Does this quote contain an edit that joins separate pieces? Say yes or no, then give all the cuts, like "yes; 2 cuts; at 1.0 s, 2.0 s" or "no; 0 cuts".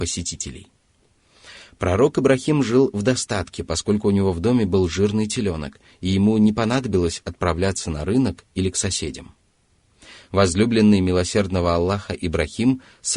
no; 0 cuts